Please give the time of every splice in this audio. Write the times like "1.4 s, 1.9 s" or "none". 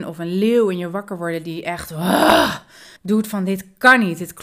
3.0 s